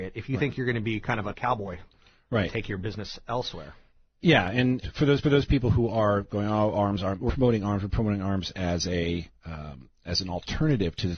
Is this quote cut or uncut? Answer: cut